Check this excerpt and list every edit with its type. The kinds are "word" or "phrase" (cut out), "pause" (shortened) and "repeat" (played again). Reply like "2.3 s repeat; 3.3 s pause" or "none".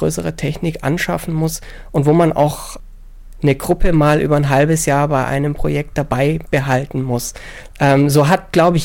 none